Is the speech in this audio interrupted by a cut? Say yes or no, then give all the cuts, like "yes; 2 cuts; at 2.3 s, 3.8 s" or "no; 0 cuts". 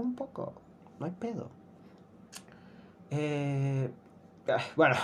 no; 0 cuts